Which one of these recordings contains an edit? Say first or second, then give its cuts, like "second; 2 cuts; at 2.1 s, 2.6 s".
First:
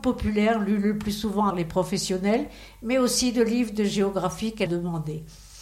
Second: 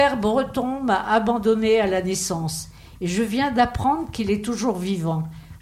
first; 2 cuts; at 1.5 s, 4.7 s